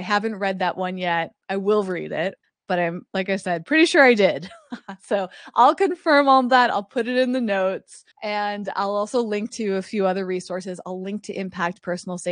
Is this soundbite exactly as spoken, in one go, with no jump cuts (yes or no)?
no